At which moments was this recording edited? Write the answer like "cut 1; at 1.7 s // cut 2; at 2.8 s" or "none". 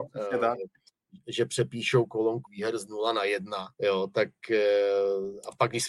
cut 1; at 2.5 s // cut 2; at 3.7 s